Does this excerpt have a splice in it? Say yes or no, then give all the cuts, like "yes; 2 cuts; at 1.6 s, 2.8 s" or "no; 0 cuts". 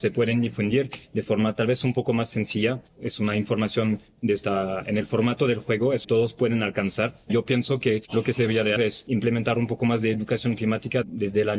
yes; 2 cuts; at 6.0 s, 8.8 s